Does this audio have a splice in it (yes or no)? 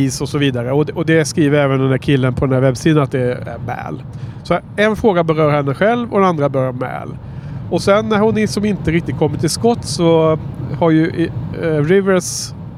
no